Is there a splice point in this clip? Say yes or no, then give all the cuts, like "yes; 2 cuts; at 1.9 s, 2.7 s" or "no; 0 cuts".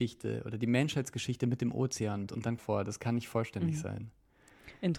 yes; 2 cuts; at 2.3 s, 2.6 s